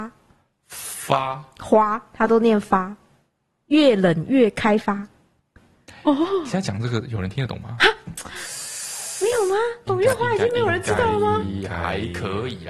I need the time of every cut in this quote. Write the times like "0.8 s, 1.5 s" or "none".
none